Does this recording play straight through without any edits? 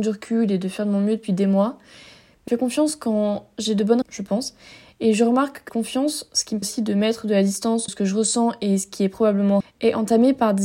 no; 6 cuts; at 2.5 s, 4.0 s, 5.7 s, 6.6 s, 7.9 s, 9.6 s

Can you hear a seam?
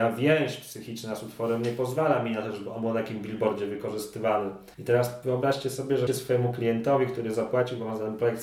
yes; 2 cuts; at 4.7 s, 6.1 s

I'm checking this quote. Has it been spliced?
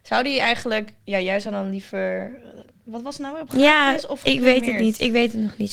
no; 0 cuts

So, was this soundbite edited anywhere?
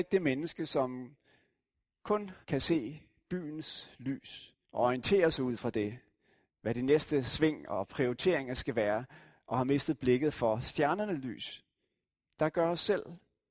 yes; 2 cuts; at 2.4 s, 4.6 s

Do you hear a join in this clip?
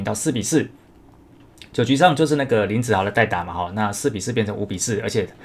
no; 0 cuts

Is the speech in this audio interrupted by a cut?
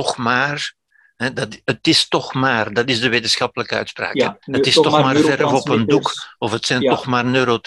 yes; 1 cut; at 4.4 s

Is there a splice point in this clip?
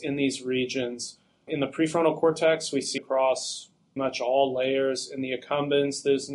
yes; 3 cuts; at 1.5 s, 3.0 s, 4.0 s

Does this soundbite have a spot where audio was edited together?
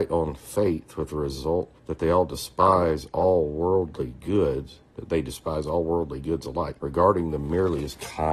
yes; 2 cuts; at 1.8 s, 6.8 s

